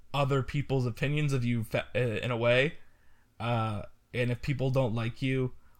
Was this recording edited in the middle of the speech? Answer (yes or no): no